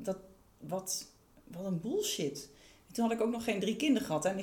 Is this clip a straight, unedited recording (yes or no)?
yes